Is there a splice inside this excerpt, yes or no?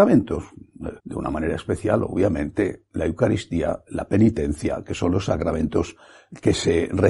yes